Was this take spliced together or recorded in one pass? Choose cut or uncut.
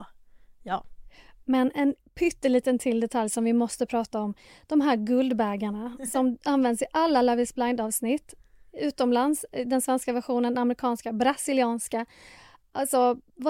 uncut